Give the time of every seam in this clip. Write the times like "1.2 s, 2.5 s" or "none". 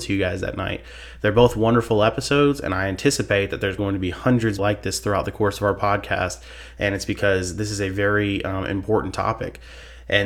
3.8 s, 4.6 s